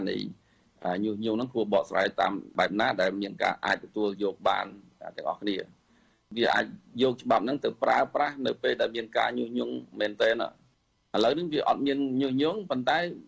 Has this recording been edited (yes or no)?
no